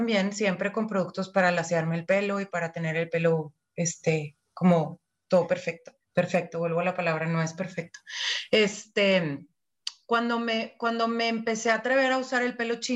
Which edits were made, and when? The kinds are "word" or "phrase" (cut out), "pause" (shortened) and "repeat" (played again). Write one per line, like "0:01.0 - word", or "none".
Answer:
0:06.0 - pause